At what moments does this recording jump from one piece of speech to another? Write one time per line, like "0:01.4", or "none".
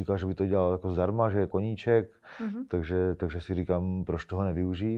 0:01.5